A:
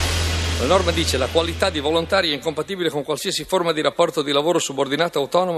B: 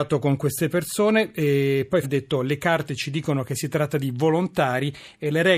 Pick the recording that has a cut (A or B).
B